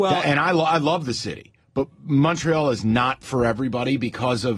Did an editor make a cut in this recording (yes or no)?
no